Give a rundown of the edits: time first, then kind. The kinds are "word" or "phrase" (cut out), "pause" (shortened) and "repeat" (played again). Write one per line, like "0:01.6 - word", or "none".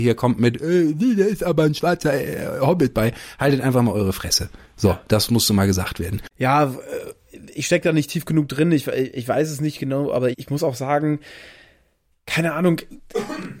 0:06.3 - pause
0:10.3 - word